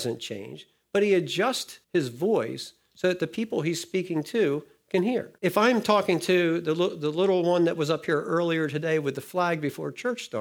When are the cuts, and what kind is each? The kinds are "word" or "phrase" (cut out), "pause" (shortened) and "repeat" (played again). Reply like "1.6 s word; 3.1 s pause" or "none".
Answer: 1.8 s pause; 5.4 s pause